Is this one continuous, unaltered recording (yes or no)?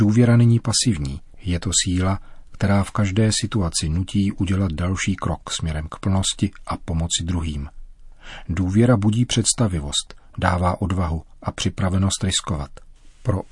yes